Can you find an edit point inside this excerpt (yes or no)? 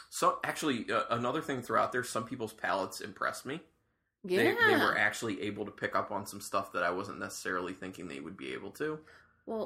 no